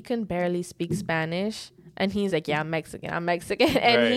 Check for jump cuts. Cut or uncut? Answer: cut